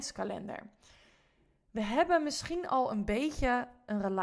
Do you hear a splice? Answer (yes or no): no